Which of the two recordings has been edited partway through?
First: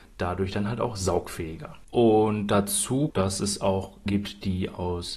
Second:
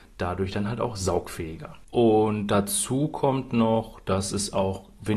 first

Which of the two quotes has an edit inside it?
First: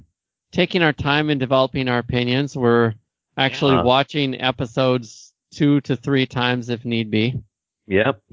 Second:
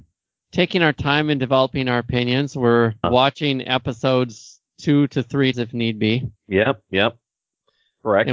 second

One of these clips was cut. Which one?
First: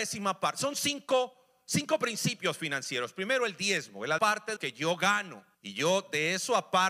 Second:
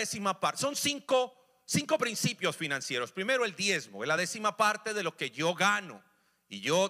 first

